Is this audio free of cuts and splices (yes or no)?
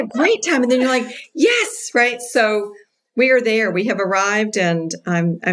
yes